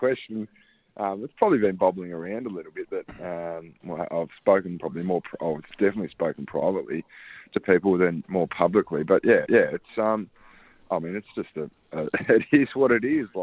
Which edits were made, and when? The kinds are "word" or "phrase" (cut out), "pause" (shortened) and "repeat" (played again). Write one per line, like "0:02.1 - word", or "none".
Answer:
0:03.8 - pause
0:09.5 - repeat